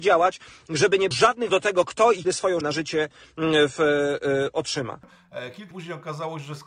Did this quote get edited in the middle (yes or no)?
yes